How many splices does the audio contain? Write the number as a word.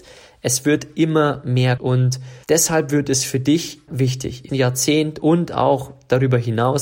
four